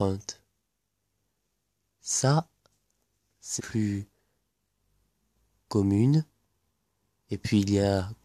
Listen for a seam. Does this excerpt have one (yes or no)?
yes